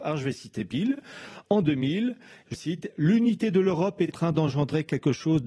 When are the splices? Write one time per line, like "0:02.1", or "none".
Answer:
0:02.5
0:04.1